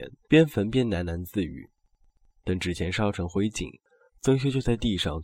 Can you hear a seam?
no; 0 cuts

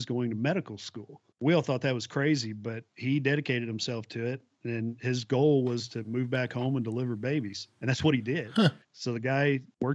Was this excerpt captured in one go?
no; 4 cuts; at 1.3 s, 2.9 s, 7.7 s, 8.8 s

